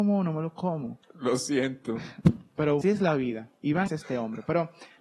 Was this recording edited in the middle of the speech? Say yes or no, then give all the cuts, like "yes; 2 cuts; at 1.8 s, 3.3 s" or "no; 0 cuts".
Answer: yes; 3 cuts; at 1.0 s, 2.8 s, 3.9 s